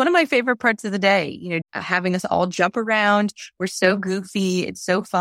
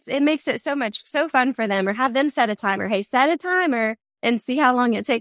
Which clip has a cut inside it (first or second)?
first